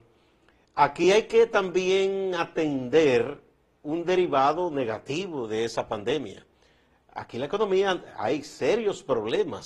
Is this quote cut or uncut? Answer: uncut